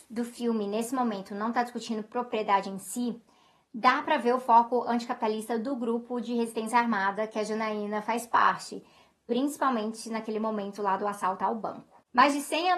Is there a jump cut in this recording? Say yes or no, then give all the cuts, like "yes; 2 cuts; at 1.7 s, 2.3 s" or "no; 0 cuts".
no; 0 cuts